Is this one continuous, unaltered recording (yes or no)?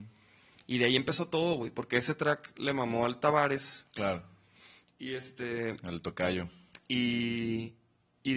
yes